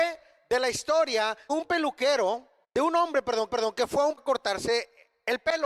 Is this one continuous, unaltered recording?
no; 4 cuts; at 1.5 s, 2.6 s, 3.5 s, 4.2 s

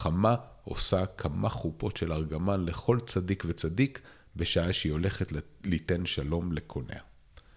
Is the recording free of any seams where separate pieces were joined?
yes; 0 cuts

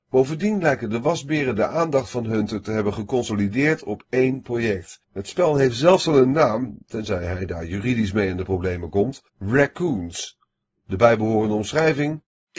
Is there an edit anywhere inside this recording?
yes; 2 cuts; at 5.0 s, 9.3 s

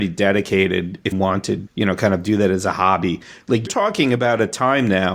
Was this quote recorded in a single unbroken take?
no; 3 cuts; at 1.1 s, 1.7 s, 3.7 s

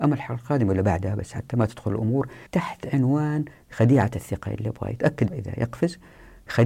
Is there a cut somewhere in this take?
yes; 2 cuts; at 2.5 s, 5.3 s

